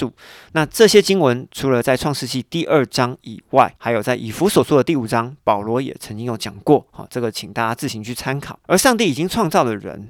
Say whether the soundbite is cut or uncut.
cut